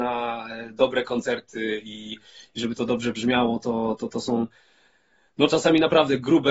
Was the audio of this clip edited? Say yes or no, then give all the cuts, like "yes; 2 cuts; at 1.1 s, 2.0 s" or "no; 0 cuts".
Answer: no; 0 cuts